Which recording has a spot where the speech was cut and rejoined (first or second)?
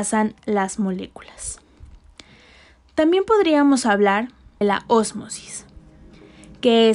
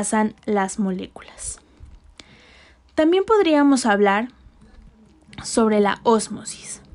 first